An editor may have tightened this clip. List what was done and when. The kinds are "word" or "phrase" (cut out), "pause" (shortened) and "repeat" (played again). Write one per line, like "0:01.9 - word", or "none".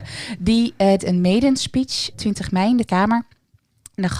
0:01.0 - word
0:02.1 - word
0:02.8 - word